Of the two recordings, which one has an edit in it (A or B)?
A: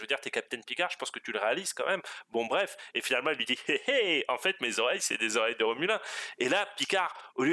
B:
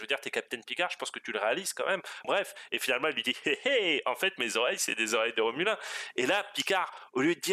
B